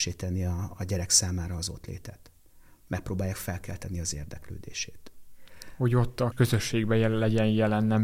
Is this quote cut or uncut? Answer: cut